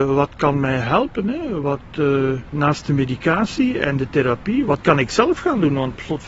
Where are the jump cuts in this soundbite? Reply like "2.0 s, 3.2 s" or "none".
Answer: none